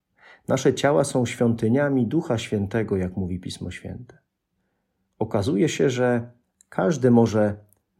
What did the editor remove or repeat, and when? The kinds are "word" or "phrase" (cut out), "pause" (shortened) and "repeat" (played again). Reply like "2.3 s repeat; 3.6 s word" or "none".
none